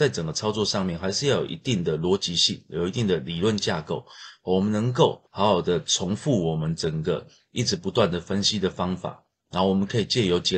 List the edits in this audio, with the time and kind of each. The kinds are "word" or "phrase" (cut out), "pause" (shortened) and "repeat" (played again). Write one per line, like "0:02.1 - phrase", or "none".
0:05.3 - pause

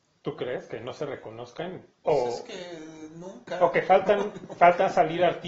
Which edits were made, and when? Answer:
0:01.9 - pause

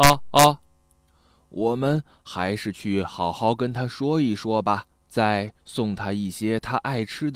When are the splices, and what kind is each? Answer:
0:05.0 - pause

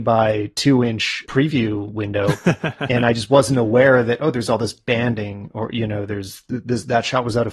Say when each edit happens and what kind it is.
0:01.2 - word

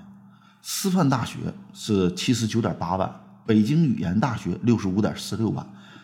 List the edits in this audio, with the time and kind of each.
none

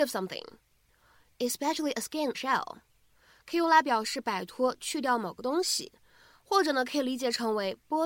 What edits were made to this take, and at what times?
0:02.3 - word

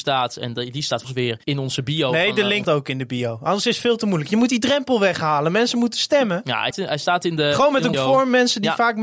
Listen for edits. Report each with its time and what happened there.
0:01.0 - word
0:01.4 - pause
0:02.6 - phrase
0:06.7 - word
0:07.9 - word

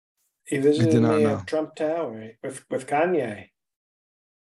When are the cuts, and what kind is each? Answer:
none

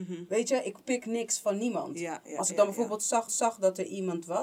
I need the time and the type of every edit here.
0:02.2 - word
0:03.3 - repeat

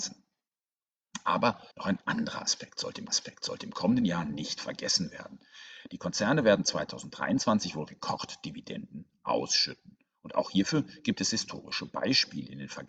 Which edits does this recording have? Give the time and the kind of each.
0:01.7 - pause
0:03.1 - repeat

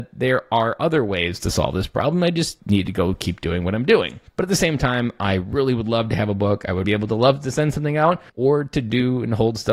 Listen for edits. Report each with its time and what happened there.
0:02.6 - pause
0:04.3 - pause
0:06.8 - word
0:08.3 - pause

